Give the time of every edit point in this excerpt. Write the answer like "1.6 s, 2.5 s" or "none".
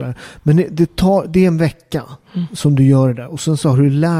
none